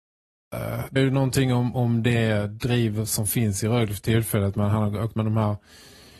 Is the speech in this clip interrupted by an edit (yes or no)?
yes